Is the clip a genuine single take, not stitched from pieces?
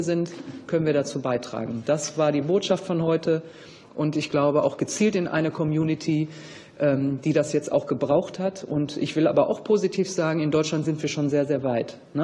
yes; 0 cuts

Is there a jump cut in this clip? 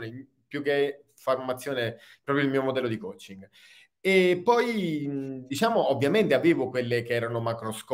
no; 0 cuts

